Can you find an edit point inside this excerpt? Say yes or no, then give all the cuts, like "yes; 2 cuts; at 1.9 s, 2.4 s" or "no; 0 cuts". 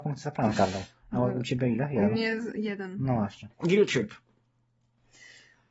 yes; 1 cut; at 3.5 s